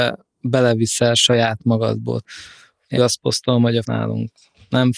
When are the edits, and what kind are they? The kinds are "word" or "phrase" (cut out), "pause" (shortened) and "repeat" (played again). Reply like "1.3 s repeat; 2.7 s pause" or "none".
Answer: 3.0 s word; 3.8 s word